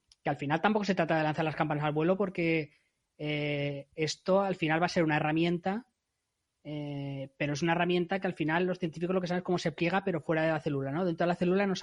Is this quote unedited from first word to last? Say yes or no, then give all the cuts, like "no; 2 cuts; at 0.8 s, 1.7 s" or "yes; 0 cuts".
yes; 0 cuts